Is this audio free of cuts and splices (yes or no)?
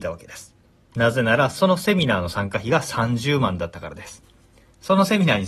yes